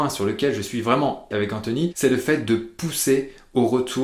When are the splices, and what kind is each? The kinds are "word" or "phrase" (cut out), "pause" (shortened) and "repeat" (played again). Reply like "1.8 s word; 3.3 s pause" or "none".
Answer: 1.3 s word